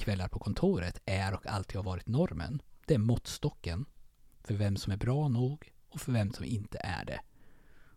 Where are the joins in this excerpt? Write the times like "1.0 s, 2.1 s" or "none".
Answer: none